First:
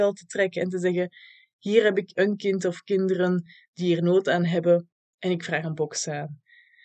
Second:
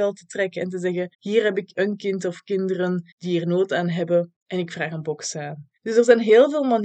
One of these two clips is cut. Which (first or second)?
second